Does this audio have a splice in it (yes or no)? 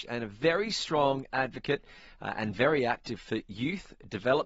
no